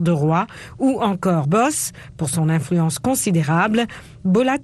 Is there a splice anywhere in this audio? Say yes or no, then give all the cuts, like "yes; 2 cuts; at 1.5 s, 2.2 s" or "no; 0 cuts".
yes; 1 cut; at 1.4 s